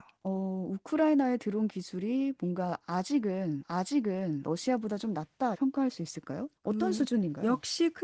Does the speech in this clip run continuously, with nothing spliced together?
no; 3 cuts; at 3.6 s, 5.5 s, 6.6 s

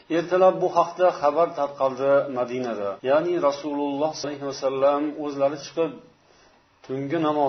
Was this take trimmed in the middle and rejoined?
yes; 2 cuts; at 3.0 s, 4.2 s

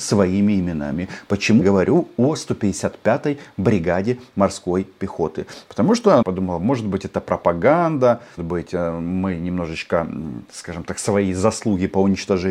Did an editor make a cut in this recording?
yes; 3 cuts; at 1.6 s, 6.2 s, 8.4 s

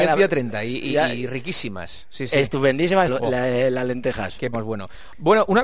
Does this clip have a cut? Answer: yes; 2 cuts; at 3.1 s, 4.5 s

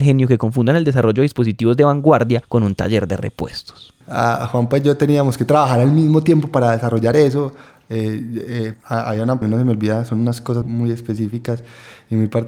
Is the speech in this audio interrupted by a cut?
yes; 4 cuts; at 4.0 s, 8.7 s, 9.4 s, 10.6 s

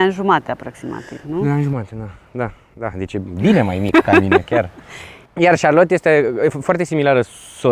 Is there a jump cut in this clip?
no; 0 cuts

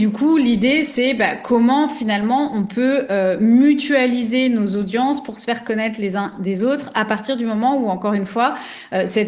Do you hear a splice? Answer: no; 0 cuts

